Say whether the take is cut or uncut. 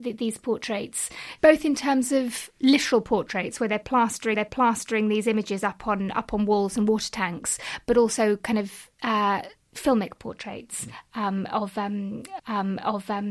cut